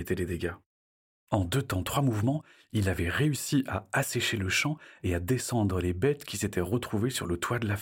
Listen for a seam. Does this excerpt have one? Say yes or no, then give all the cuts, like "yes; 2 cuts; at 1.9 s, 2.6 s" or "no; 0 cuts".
no; 0 cuts